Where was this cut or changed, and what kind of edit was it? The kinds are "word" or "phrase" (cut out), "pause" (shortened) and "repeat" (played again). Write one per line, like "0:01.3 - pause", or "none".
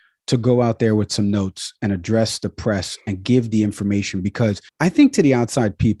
0:04.7 - pause

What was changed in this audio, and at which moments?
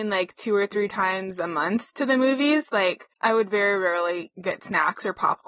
0:03.1 - pause

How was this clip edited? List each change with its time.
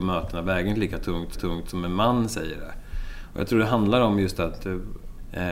0:01.3 - repeat

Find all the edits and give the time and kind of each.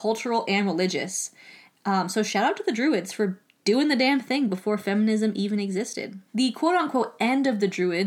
0:06.3 - pause

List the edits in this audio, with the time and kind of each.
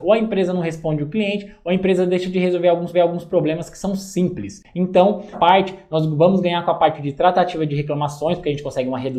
0:02.9 - repeat
0:05.3 - word

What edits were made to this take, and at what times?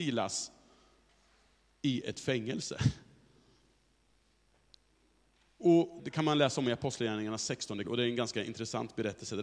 0:06.0 - word
0:07.8 - word

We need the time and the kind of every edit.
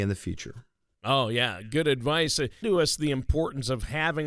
0:02.6 - word

